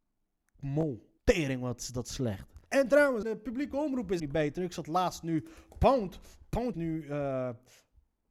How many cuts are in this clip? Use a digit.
5